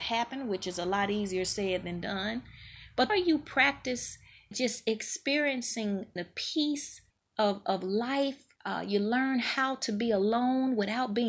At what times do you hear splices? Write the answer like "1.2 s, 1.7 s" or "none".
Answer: 3.1 s, 4.5 s, 6.2 s, 7.1 s, 8.6 s